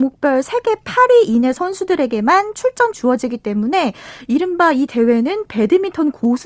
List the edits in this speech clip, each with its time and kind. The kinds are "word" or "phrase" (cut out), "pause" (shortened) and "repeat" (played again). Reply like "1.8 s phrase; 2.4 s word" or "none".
2.9 s word